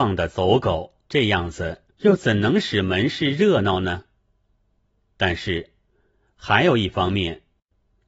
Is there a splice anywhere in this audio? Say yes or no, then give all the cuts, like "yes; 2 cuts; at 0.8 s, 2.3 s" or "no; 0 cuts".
yes; 2 cuts; at 1.0 s, 1.9 s